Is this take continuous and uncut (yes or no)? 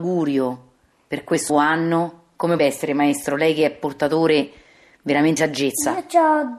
no